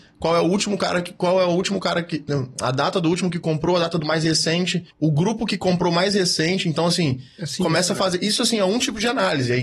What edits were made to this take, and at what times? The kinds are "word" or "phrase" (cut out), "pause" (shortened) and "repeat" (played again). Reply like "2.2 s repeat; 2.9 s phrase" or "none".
4.9 s pause